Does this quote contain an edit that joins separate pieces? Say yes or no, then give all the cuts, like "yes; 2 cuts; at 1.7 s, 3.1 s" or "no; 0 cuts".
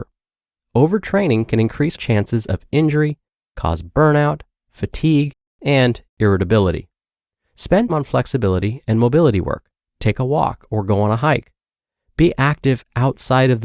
yes; 3 cuts; at 1.9 s, 7.9 s, 9.8 s